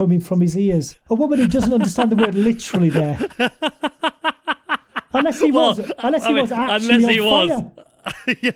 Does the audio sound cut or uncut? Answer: cut